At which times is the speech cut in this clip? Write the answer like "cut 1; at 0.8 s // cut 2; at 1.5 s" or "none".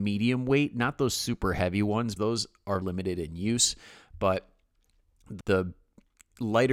cut 1; at 2.2 s // cut 2; at 2.8 s // cut 3; at 5.4 s